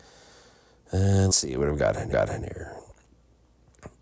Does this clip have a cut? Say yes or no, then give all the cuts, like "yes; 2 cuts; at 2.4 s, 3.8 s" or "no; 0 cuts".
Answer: yes; 2 cuts; at 1.3 s, 2.1 s